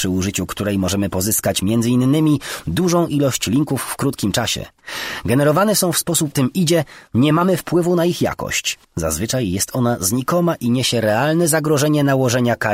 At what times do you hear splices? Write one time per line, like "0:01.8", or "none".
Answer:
0:06.3
0:08.8